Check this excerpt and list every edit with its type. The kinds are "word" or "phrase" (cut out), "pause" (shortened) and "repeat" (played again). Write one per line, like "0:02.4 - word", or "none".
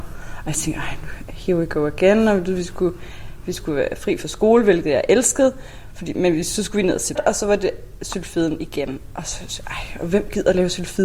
0:07.2 - word